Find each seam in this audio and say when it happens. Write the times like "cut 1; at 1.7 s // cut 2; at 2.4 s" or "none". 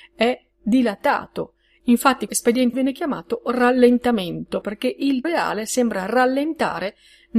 cut 1; at 2.3 s // cut 2; at 2.7 s // cut 3; at 4.6 s // cut 4; at 5.2 s